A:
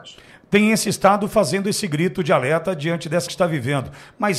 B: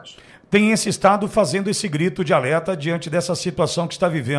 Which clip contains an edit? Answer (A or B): A